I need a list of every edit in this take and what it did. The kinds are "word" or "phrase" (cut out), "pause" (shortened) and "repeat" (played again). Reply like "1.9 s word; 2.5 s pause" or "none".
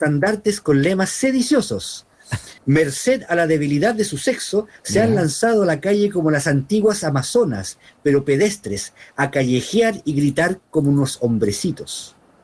2.6 s pause